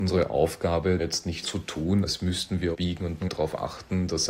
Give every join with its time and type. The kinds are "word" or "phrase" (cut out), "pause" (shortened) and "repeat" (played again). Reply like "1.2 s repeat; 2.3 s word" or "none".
1.0 s word; 1.4 s word; 2.7 s word; 3.2 s word